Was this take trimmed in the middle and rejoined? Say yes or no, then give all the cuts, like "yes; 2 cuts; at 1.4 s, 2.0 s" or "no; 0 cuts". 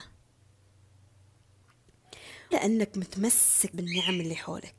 yes; 2 cuts; at 2.5 s, 3.7 s